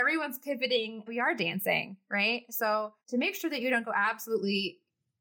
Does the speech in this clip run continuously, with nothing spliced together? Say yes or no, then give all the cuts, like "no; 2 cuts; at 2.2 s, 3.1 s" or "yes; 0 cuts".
no; 2 cuts; at 1.1 s, 3.0 s